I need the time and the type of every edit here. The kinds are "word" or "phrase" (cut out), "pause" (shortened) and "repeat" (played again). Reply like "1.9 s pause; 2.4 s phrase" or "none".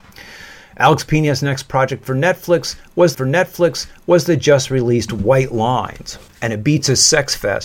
3.1 s repeat; 6.3 s pause